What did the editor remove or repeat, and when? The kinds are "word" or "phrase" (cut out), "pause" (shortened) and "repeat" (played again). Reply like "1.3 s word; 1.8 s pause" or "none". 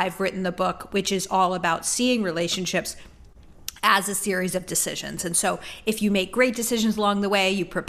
none